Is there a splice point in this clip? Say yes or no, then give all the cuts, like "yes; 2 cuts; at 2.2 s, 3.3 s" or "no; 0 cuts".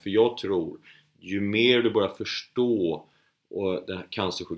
no; 0 cuts